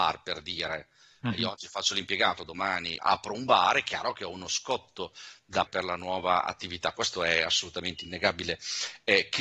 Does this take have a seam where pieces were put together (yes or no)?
yes